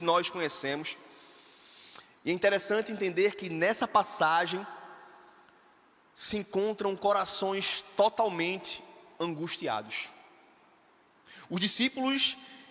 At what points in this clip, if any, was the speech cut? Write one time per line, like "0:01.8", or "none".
none

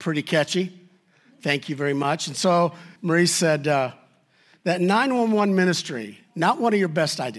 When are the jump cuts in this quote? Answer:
0:03.0

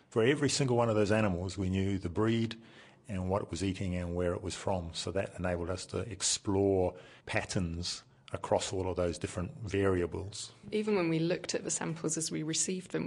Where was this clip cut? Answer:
0:07.2

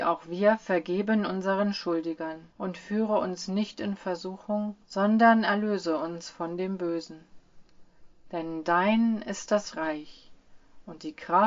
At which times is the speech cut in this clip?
0:02.5
0:04.8

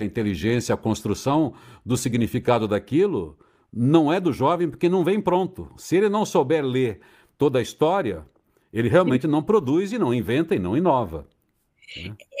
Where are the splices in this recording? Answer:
none

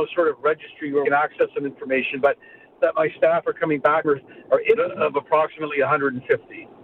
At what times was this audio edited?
0:01.0
0:02.8
0:04.0
0:04.8

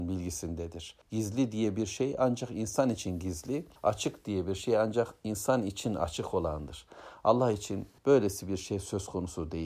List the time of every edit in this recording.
0:01.0
0:03.8
0:08.0

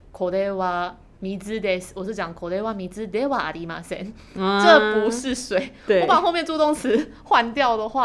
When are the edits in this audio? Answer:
none

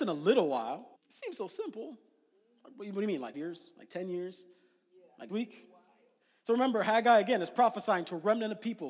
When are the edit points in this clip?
0:01.0
0:03.3
0:05.3

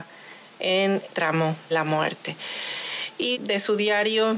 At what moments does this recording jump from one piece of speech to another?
0:01.1
0:01.7
0:03.3

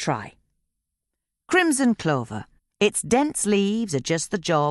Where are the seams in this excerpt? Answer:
0:02.6

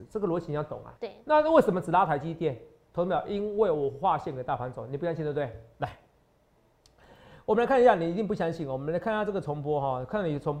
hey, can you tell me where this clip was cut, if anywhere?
0:01.0

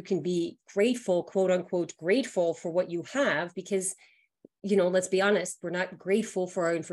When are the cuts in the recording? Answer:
none

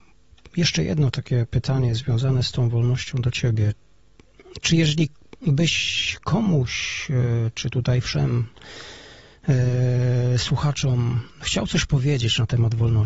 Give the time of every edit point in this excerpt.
0:05.4
0:11.3

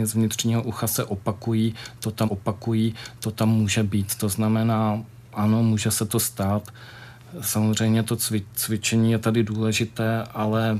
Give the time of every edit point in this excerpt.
0:02.2

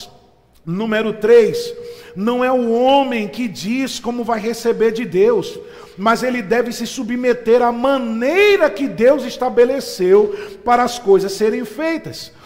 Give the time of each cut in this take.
none

